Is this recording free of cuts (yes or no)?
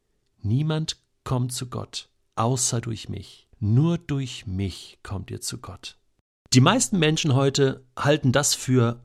no